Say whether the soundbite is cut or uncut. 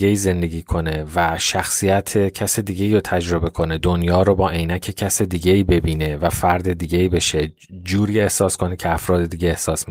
uncut